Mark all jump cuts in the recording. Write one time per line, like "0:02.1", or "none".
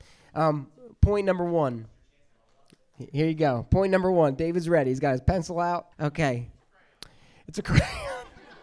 0:05.9